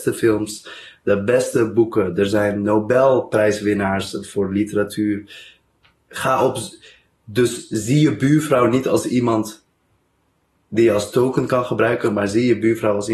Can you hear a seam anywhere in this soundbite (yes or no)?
no